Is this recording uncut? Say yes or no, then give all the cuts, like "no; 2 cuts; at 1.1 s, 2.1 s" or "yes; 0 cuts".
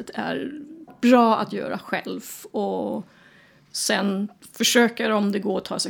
no; 1 cut; at 4.4 s